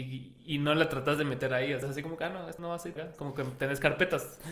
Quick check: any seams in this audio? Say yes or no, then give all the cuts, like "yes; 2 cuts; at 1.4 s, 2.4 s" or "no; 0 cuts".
yes; 3 cuts; at 1.8 s, 2.6 s, 3.0 s